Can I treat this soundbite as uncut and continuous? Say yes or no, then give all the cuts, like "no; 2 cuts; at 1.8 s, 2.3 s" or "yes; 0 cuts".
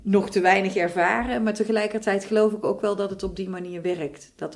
yes; 0 cuts